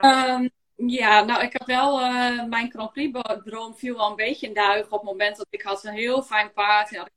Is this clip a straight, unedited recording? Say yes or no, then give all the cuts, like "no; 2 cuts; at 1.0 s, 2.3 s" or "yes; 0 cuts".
yes; 0 cuts